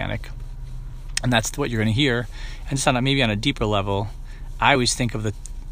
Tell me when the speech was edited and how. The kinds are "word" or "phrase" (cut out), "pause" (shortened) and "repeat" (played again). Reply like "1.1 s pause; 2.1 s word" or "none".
none

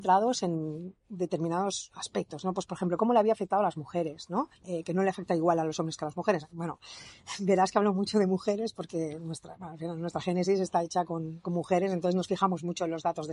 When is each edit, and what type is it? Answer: 4.6 s pause

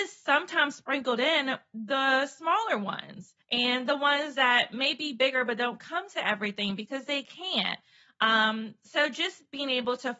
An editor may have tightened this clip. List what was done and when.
3.4 s pause

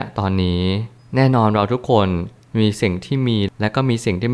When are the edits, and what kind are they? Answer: none

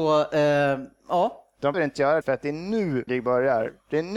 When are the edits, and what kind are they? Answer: 1.7 s word; 2.2 s word; 3.1 s word

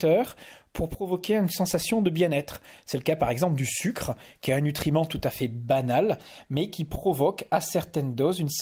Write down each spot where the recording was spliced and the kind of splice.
none

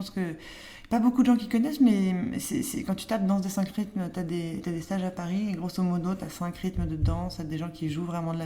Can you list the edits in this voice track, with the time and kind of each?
none

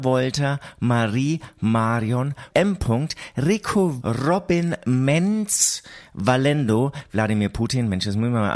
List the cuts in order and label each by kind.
2.5 s phrase; 4.0 s word

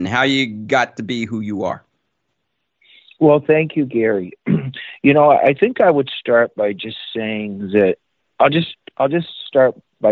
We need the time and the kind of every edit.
none

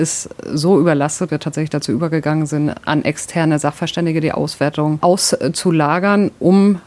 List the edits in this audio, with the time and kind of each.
1.3 s word

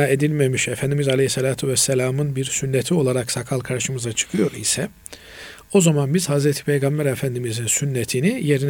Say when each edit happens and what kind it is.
none

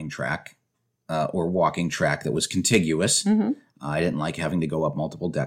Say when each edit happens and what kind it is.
none

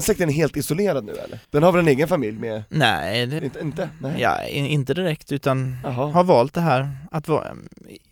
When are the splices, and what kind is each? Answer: 1.4 s pause; 3.4 s word

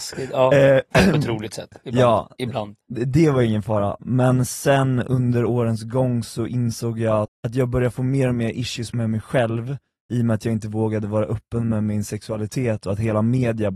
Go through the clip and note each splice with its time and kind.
7.2 s word

